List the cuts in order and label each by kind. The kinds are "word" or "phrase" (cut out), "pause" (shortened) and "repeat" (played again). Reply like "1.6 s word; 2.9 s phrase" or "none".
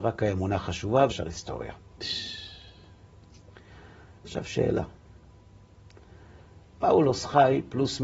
1.1 s word